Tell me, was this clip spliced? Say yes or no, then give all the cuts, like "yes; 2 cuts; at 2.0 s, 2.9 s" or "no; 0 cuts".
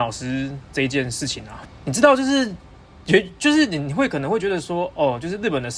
no; 0 cuts